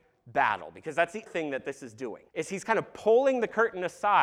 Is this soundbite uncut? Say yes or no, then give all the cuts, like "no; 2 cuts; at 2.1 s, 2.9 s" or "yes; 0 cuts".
no; 2 cuts; at 1.3 s, 2.3 s